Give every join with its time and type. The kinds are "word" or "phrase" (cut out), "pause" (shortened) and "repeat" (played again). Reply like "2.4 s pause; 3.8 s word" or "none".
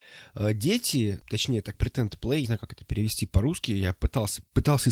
1.2 s word; 1.7 s word; 2.4 s word